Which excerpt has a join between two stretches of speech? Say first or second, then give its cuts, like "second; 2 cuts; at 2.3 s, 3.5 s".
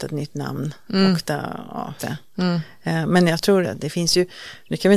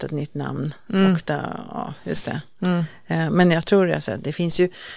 first; 2 cuts; at 2.0 s, 3.6 s